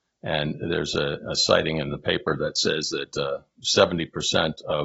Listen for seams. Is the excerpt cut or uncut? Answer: uncut